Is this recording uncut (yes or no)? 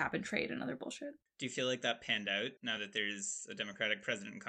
no